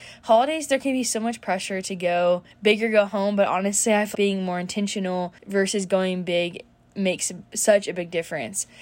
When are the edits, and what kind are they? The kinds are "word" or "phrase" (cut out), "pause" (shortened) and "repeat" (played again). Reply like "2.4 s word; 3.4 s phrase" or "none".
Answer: 2.5 s pause; 4.1 s word; 5.4 s pause